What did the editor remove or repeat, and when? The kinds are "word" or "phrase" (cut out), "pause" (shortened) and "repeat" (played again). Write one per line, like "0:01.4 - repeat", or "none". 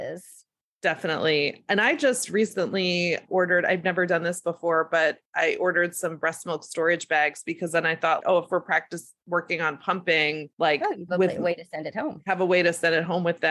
0:05.3 - pause
0:08.2 - word
0:10.5 - pause
0:11.1 - word